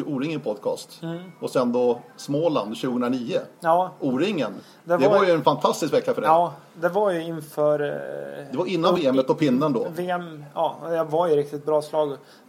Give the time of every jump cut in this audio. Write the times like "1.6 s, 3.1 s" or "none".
none